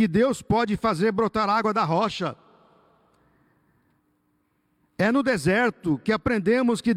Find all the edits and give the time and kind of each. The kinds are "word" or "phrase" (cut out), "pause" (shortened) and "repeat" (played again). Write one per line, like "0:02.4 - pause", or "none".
none